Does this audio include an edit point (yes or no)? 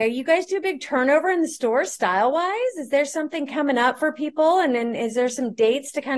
no